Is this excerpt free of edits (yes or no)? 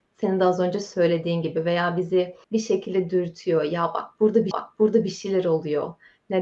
no